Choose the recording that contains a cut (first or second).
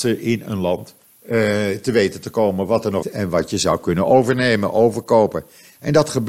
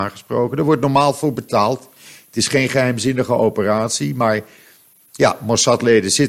first